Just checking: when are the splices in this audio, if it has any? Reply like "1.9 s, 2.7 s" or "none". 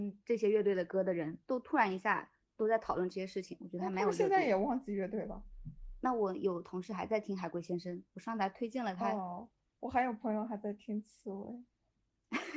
none